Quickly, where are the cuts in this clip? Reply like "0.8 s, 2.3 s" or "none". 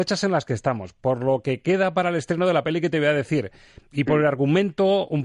none